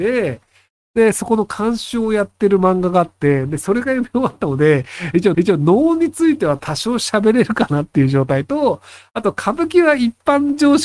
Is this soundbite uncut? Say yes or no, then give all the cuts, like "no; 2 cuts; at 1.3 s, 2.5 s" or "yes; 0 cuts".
no; 1 cut; at 5.3 s